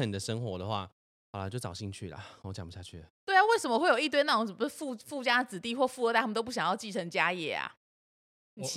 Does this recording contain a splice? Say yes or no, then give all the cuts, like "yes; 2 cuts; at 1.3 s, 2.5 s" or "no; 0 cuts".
no; 0 cuts